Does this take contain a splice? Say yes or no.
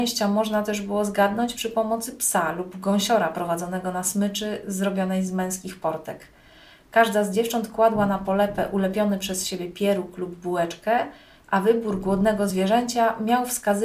no